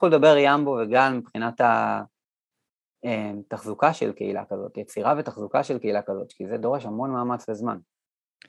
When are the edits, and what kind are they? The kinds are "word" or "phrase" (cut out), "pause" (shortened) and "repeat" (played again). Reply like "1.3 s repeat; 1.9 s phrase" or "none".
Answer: none